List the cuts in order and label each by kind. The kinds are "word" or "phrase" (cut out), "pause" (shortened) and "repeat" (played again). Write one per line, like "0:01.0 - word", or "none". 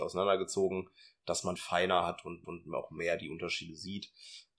0:01.6 - phrase
0:02.4 - repeat